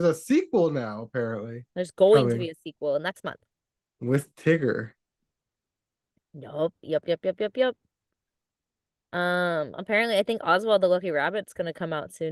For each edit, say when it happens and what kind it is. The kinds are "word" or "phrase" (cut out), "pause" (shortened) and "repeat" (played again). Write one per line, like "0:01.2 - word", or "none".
0:01.7 - pause